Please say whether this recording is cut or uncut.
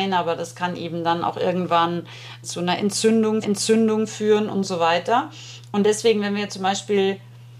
cut